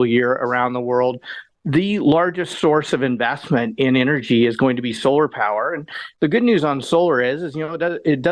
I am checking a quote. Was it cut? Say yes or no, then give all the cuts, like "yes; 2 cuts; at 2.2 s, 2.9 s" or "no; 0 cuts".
yes; 1 cut; at 1.5 s